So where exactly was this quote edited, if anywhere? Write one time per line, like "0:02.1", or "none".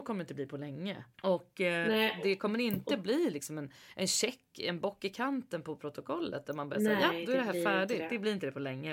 0:01.1